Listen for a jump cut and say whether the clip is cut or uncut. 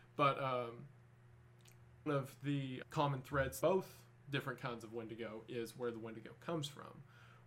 cut